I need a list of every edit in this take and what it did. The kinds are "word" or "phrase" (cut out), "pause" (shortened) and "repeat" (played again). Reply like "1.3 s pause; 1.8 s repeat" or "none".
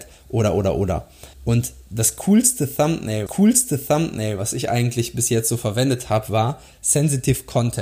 1.3 s pause; 3.3 s repeat